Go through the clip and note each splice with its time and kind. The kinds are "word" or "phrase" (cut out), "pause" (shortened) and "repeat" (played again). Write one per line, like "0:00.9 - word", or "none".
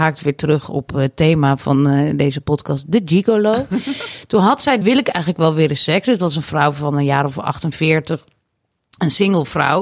0:04.8 - phrase